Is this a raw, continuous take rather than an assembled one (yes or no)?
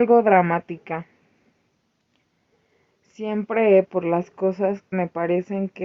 no